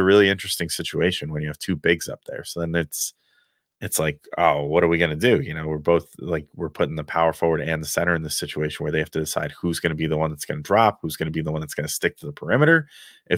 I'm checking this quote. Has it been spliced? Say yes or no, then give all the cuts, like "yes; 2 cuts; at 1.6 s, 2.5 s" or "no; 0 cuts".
no; 0 cuts